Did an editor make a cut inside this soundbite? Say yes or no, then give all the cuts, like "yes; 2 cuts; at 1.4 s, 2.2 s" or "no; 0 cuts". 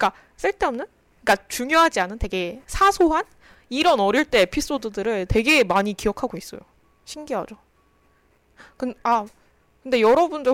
no; 0 cuts